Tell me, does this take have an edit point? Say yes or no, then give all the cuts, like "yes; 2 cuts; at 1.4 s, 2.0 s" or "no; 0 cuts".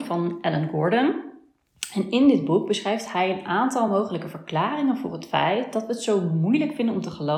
no; 0 cuts